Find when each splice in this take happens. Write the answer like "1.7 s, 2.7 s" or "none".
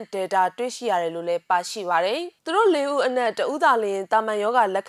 2.4 s